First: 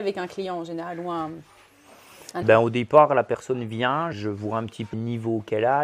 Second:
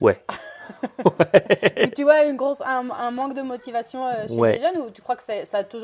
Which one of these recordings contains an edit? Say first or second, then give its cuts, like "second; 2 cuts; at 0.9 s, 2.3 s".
first; 3 cuts; at 2.4 s, 4.1 s, 4.9 s